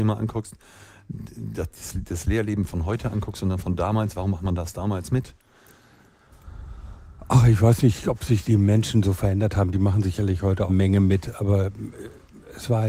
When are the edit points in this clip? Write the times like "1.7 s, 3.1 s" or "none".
8.4 s, 10.7 s